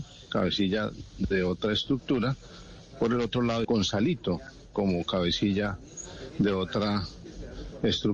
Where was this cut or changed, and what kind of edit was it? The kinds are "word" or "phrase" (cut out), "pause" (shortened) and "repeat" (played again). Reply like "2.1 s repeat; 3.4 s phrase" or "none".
3.6 s word